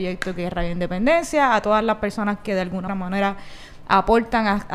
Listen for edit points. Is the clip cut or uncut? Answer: cut